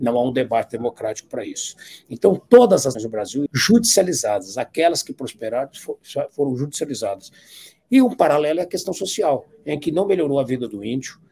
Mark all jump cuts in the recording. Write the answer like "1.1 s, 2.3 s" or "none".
2.9 s, 3.5 s